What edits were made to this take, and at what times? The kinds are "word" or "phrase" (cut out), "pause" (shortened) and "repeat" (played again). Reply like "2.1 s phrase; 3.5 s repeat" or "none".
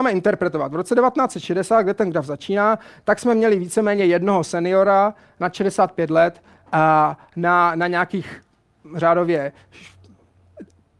none